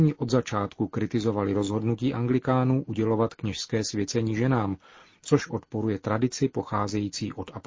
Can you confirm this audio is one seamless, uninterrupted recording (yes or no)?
yes